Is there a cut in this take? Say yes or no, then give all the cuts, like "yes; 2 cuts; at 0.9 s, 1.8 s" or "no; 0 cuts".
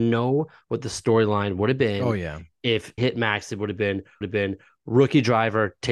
yes; 2 cuts; at 3.0 s, 4.2 s